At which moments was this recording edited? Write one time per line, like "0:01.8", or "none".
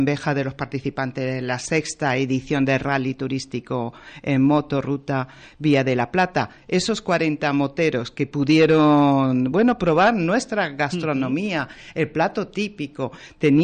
none